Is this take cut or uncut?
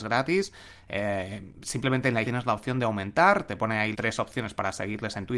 cut